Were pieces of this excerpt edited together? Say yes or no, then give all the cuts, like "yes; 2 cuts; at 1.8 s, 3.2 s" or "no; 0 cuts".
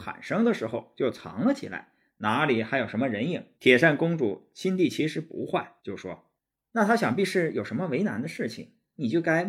yes; 3 cuts; at 3.5 s, 5.8 s, 6.4 s